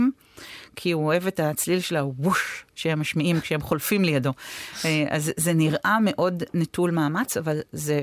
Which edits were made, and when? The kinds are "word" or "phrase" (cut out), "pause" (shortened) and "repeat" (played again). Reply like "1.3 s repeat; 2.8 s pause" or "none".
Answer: none